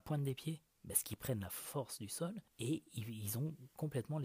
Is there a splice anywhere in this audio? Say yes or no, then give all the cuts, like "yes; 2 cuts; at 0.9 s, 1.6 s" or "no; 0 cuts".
yes; 1 cut; at 2.5 s